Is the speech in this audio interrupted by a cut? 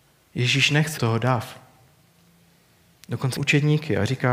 yes; 2 cuts; at 1.0 s, 3.4 s

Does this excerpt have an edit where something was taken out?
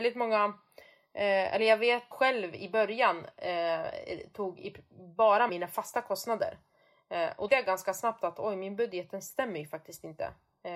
yes; 3 cuts; at 2.1 s, 5.5 s, 7.5 s

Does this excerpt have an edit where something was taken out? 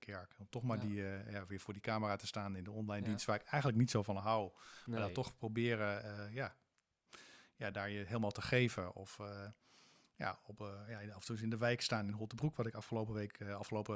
no; 0 cuts

